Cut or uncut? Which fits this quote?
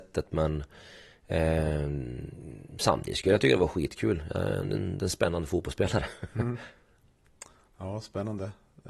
uncut